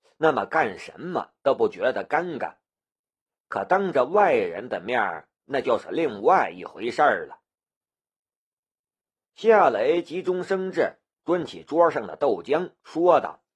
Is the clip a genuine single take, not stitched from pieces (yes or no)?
yes